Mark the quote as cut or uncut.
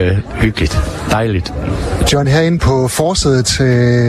uncut